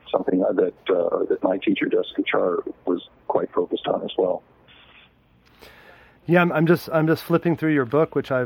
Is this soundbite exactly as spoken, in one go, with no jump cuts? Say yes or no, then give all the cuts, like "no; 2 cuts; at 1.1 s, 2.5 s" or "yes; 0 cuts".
yes; 0 cuts